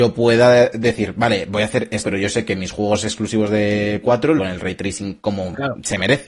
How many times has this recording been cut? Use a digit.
3